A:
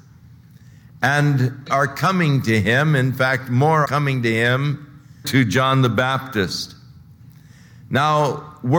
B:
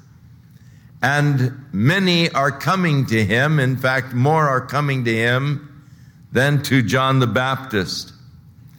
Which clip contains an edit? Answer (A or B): A